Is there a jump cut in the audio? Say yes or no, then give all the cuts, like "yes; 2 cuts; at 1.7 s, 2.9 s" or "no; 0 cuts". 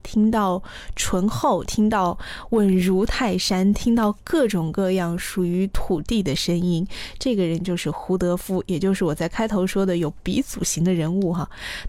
yes; 1 cut; at 1.6 s